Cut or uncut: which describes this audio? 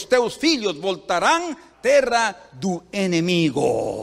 cut